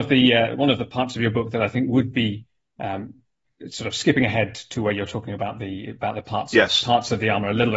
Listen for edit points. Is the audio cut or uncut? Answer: uncut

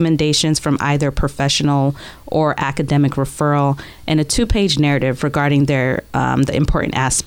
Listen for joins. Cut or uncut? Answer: uncut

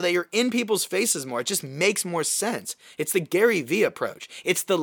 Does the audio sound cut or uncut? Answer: uncut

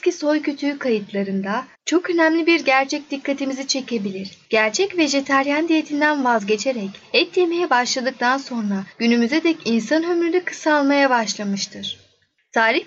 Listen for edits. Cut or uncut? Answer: cut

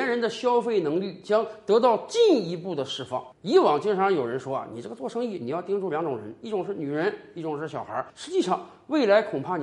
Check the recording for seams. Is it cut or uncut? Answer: cut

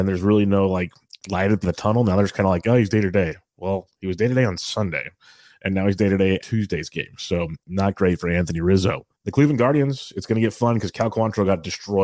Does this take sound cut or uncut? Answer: cut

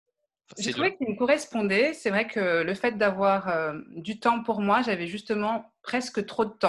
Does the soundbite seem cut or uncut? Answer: uncut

